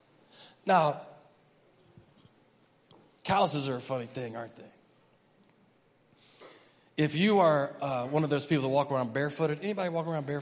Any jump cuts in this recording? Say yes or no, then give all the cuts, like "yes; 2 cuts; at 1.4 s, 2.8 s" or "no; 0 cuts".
no; 0 cuts